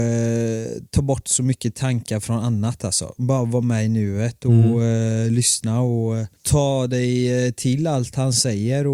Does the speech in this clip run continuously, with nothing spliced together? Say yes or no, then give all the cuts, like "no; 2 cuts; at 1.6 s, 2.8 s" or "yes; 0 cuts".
no; 1 cut; at 6.4 s